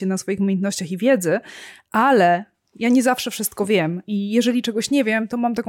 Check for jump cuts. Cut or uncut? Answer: uncut